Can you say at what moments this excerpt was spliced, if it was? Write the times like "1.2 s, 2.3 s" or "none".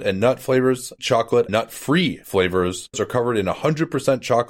1.0 s, 1.5 s, 2.9 s